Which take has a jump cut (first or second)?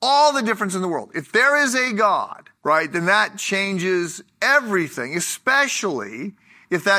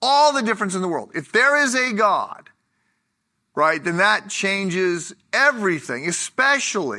first